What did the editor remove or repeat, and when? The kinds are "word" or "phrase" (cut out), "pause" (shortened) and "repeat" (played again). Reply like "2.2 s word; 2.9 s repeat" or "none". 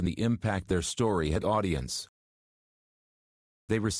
1.4 s phrase